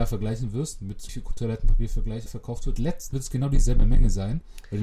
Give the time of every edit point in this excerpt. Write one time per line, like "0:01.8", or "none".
0:01.1
0:02.3
0:02.8
0:03.1